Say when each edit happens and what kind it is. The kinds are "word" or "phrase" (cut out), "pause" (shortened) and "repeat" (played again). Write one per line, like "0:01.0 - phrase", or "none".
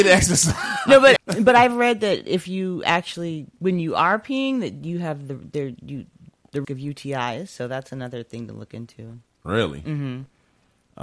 0:01.2 - word
0:03.5 - pause
0:06.6 - word